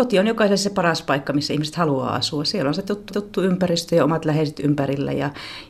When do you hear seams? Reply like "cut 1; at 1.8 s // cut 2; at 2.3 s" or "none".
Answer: cut 1; at 3.1 s